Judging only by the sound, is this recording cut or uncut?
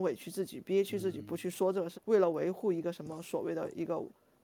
cut